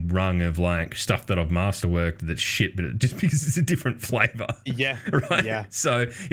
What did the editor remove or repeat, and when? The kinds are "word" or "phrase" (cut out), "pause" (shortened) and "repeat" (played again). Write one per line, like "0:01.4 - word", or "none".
none